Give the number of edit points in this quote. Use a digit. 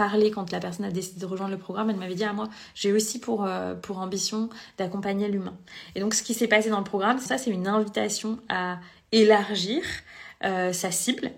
1